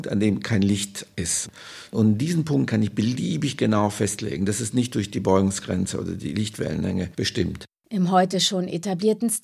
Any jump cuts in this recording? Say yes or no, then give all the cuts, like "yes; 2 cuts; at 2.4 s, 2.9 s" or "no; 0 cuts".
no; 0 cuts